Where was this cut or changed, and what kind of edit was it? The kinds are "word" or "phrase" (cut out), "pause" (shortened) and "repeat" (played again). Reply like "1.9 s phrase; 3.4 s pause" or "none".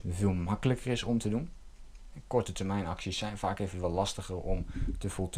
none